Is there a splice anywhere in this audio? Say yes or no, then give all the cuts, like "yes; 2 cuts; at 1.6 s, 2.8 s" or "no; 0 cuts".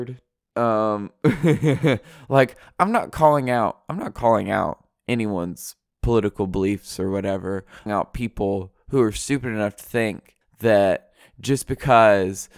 yes; 2 cuts; at 7.9 s, 10.4 s